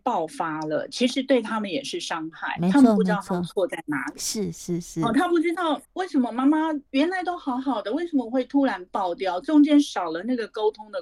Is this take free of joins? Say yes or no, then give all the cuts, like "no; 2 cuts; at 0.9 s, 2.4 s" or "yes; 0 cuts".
no; 2 cuts; at 5.8 s, 6.9 s